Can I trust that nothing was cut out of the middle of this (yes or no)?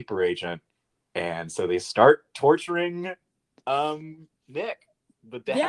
yes